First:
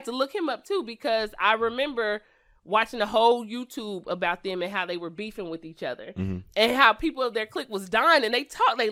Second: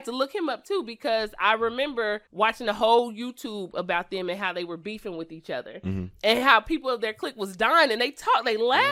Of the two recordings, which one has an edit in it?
second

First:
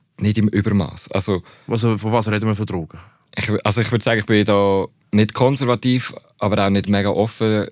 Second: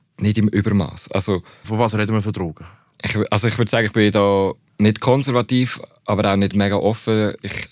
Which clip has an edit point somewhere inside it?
second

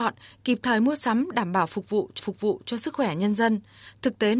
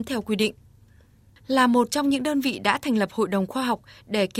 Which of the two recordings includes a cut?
first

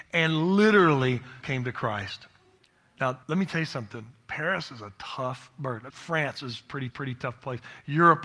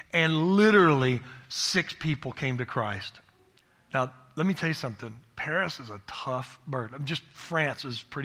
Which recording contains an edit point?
first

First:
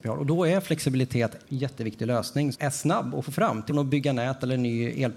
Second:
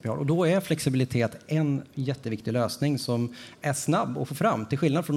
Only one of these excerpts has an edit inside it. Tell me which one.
first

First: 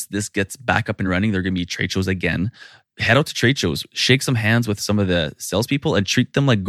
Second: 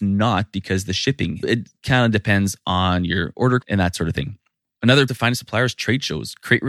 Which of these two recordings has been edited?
second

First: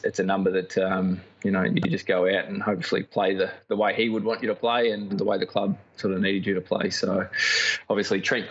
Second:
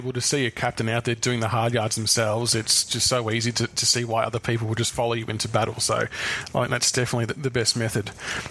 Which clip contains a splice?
first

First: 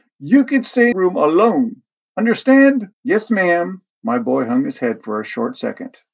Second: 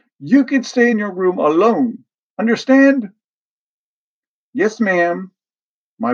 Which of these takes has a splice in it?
first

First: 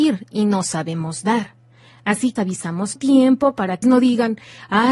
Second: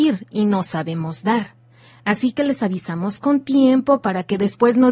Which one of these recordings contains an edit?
first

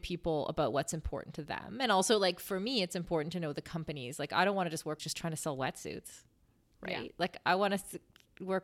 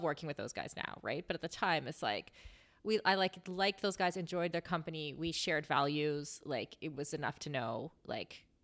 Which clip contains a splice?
first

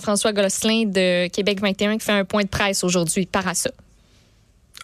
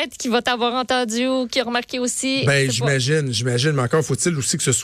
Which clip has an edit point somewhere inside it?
first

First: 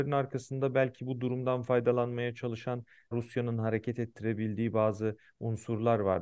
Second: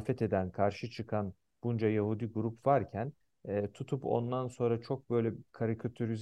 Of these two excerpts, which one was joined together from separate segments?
first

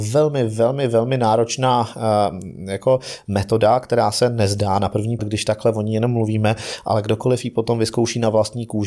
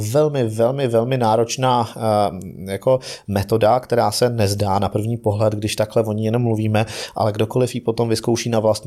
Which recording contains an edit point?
first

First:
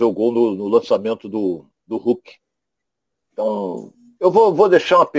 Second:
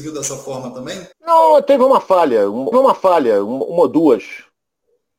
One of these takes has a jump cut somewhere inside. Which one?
second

